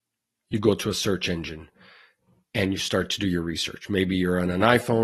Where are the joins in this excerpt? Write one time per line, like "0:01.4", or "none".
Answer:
none